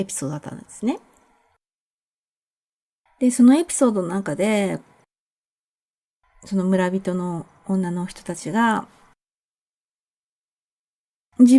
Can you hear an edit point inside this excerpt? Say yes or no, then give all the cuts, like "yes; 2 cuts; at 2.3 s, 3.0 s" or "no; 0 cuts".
no; 0 cuts